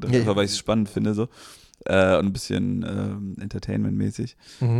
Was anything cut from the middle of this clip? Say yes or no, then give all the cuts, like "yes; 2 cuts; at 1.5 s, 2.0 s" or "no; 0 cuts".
no; 0 cuts